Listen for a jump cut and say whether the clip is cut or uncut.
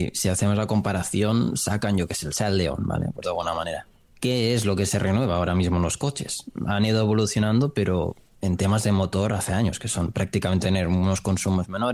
cut